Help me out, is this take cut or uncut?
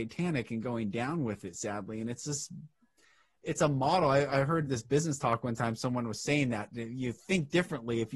uncut